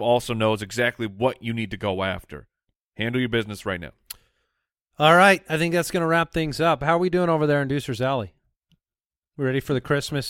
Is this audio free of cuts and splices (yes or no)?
yes